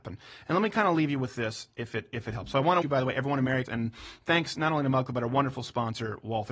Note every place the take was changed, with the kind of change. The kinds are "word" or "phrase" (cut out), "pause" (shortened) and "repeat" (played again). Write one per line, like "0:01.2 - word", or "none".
0:02.8 - word
0:03.7 - word